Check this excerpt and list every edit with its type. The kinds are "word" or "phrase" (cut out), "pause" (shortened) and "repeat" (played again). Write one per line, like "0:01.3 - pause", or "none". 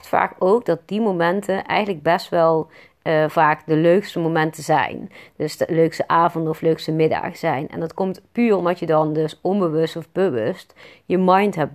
none